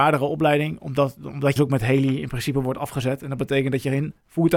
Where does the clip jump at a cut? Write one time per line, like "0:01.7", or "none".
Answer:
0:01.6